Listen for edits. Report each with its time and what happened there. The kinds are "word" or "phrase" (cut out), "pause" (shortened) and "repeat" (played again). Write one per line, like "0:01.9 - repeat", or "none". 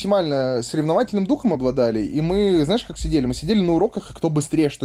none